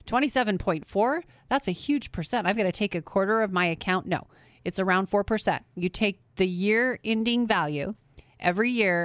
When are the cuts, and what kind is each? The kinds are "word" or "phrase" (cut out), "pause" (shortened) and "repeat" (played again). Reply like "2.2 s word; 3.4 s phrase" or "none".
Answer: none